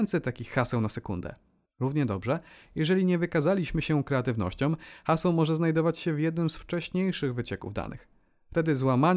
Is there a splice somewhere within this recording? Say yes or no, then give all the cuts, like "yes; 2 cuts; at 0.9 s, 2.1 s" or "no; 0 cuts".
no; 0 cuts